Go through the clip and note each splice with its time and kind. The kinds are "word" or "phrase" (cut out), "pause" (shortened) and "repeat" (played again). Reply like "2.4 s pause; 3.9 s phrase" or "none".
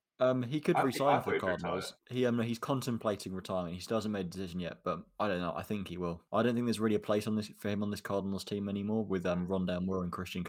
2.0 s pause; 6.3 s pause